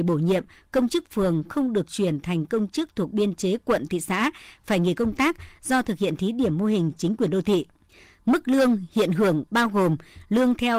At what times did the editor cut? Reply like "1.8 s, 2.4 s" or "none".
7.9 s